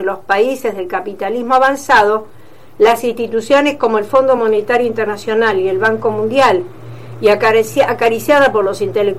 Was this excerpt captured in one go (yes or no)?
yes